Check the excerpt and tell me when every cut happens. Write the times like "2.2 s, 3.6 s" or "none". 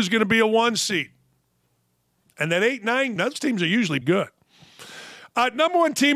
3.2 s, 4.0 s